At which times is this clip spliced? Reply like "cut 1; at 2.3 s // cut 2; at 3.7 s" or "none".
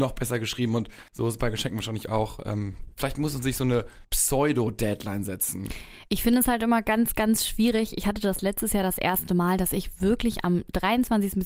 cut 1; at 1.1 s // cut 2; at 4.0 s